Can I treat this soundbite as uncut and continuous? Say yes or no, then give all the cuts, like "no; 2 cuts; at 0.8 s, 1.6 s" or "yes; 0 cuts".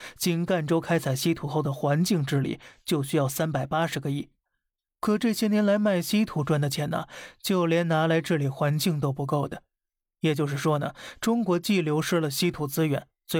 yes; 0 cuts